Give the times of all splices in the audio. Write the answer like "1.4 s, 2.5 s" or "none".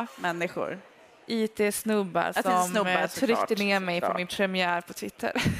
none